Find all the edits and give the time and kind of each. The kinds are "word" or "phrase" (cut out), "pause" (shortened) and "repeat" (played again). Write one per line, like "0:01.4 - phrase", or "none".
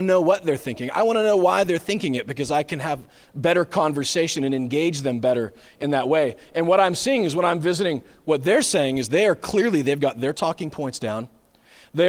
none